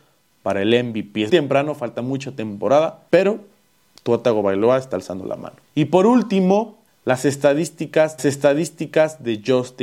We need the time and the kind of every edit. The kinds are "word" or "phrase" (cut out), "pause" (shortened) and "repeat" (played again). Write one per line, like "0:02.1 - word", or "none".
0:01.3 - word
0:03.1 - pause
0:05.6 - pause
0:06.9 - pause
0:08.2 - repeat